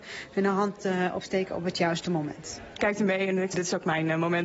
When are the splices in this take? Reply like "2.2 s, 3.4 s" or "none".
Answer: 2.8 s, 3.5 s